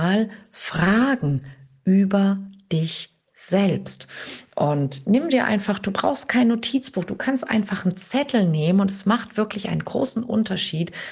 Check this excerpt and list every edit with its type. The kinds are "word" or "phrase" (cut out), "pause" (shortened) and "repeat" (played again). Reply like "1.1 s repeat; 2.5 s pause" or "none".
none